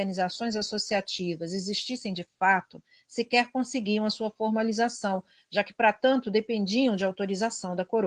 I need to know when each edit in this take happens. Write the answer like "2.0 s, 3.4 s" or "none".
none